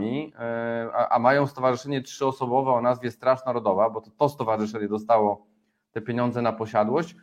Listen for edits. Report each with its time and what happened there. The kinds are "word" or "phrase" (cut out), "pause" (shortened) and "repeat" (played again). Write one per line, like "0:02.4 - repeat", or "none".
none